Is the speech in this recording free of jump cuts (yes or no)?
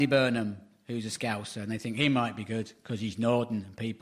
yes